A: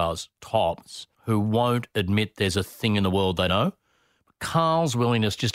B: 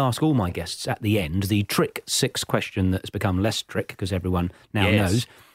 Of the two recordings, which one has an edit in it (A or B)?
A